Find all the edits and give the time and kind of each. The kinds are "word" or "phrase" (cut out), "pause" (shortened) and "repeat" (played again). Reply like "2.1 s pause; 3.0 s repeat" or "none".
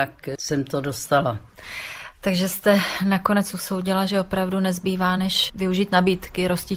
none